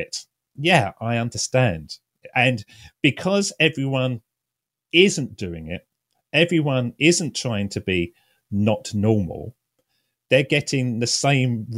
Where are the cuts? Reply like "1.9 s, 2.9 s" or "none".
none